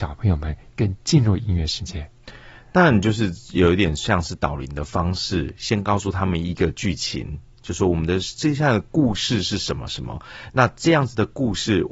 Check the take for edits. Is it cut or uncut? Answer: uncut